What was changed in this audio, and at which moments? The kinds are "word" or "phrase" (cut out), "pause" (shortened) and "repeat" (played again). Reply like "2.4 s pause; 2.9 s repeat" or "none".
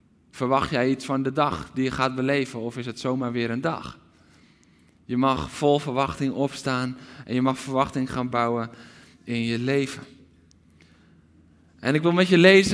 none